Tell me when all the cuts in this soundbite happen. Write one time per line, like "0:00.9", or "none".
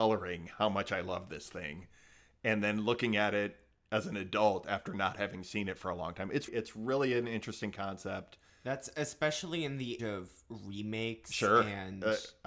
0:06.5
0:10.0